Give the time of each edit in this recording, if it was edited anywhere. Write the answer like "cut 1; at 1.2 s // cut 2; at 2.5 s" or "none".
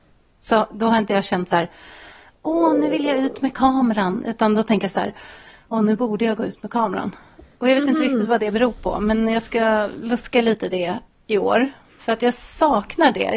cut 1; at 11.1 s